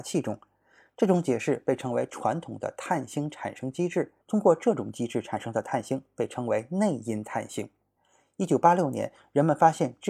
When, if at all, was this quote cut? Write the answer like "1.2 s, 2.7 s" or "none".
4.2 s